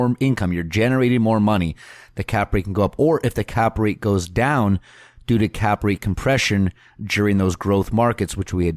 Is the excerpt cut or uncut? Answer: uncut